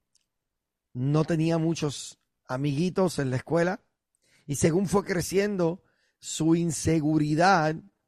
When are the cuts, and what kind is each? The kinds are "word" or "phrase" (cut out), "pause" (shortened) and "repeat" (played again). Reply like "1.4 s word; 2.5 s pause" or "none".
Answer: none